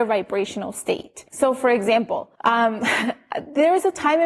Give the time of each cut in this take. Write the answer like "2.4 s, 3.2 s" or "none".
1.3 s, 2.4 s